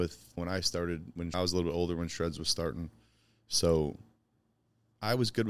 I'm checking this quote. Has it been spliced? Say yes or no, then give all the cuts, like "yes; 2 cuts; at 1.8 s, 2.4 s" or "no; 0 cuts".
no; 0 cuts